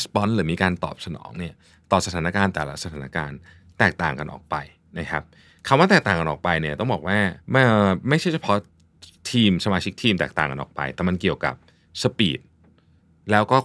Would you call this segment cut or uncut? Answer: cut